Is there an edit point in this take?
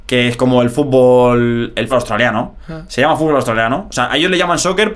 yes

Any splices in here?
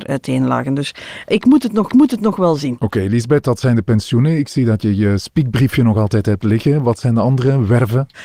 yes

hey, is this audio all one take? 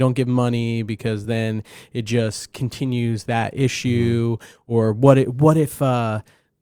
yes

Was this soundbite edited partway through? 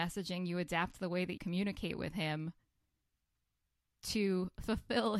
yes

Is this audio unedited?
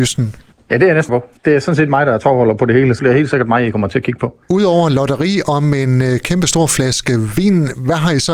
no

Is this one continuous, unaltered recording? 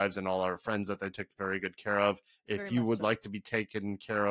yes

